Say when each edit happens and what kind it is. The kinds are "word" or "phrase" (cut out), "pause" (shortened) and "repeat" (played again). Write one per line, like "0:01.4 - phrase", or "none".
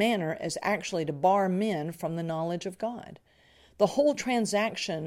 none